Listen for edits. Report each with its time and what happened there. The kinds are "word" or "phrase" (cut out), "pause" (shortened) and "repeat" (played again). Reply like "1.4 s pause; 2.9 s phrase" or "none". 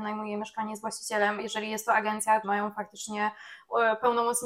1.4 s word; 2.4 s word

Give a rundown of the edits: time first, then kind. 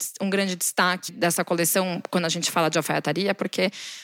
1.1 s word

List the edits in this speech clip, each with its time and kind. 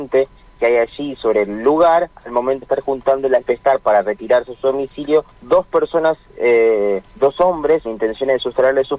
2.6 s word; 3.4 s phrase; 5.3 s pause; 7.1 s pause; 7.8 s word

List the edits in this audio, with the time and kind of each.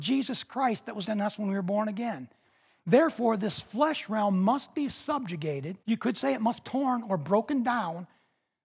1.0 s word; 5.8 s pause; 6.6 s word

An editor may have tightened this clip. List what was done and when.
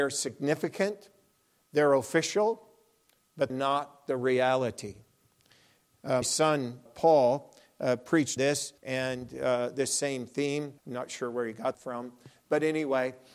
3.5 s word; 6.2 s word; 6.9 s word; 8.4 s phrase; 8.8 s pause; 10.8 s pause; 11.7 s word

